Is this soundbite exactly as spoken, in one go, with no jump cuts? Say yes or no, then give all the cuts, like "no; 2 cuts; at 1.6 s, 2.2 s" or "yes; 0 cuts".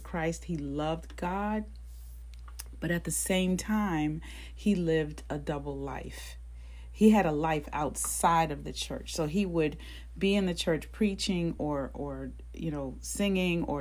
yes; 0 cuts